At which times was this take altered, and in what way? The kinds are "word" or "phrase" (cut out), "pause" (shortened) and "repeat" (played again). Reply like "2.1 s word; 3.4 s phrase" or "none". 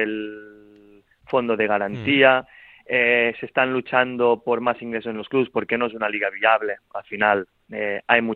none